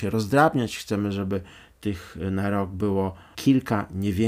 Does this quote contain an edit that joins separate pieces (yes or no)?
no